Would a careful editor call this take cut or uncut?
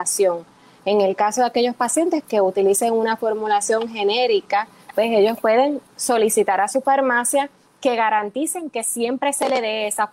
uncut